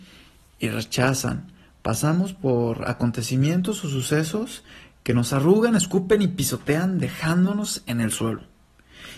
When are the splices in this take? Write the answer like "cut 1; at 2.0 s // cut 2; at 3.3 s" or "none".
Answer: none